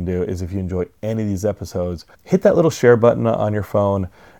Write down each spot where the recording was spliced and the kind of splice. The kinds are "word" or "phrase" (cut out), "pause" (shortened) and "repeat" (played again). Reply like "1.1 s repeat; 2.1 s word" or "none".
2.1 s pause